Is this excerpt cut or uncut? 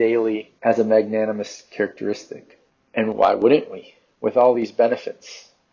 uncut